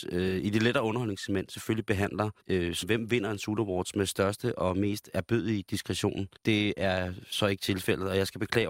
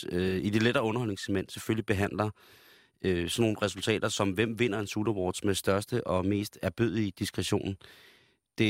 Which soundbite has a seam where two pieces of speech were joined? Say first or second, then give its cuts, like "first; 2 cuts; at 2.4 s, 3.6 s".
first; 3 cuts; at 2.4 s, 2.8 s, 6.4 s